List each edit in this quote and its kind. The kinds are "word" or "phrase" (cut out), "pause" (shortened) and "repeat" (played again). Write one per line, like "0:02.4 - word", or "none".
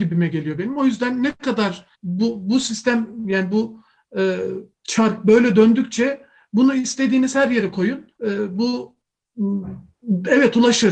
0:01.9 - pause
0:04.7 - pause
0:08.2 - pause

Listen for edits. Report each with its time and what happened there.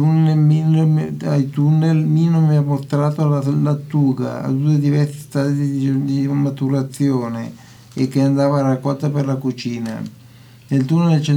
none

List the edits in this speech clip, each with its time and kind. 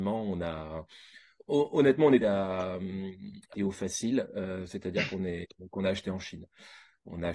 0:01.4 - pause
0:02.2 - word
0:03.5 - phrase

